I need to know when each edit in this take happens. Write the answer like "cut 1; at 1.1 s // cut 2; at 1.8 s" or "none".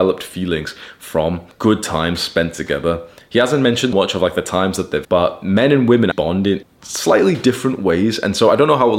cut 1; at 1.5 s // cut 2; at 3.9 s // cut 3; at 5.0 s // cut 4; at 6.1 s // cut 5; at 6.6 s